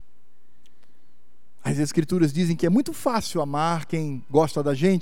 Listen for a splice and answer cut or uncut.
uncut